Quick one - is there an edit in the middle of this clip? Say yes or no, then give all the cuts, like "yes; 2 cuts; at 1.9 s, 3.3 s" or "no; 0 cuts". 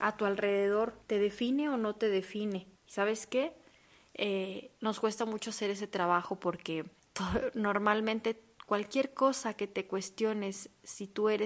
yes; 4 cuts; at 1.0 s, 2.8 s, 4.8 s, 7.0 s